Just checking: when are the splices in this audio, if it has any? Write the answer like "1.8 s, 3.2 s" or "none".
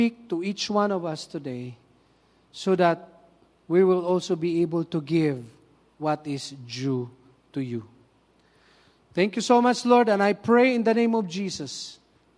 none